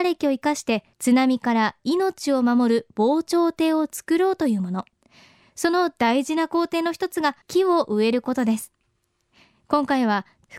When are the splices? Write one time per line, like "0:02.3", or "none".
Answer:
0:00.9
0:07.4